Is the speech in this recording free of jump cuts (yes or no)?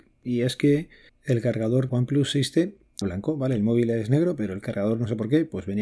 no